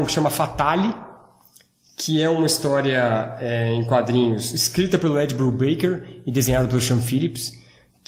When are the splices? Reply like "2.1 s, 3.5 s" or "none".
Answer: none